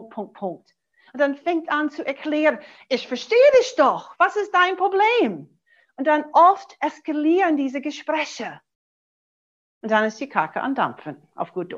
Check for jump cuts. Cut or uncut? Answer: uncut